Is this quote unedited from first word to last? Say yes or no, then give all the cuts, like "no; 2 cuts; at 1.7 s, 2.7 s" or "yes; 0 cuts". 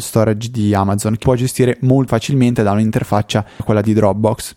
no; 3 cuts; at 1.2 s, 2.1 s, 3.6 s